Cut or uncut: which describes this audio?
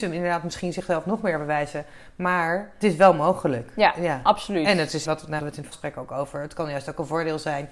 cut